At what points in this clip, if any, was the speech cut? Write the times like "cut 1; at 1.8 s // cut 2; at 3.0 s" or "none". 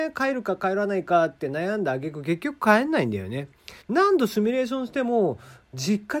cut 1; at 3.8 s